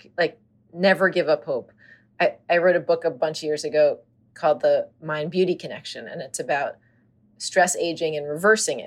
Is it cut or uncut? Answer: uncut